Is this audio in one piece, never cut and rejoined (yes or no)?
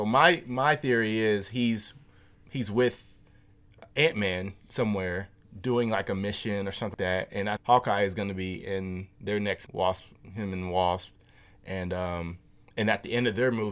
no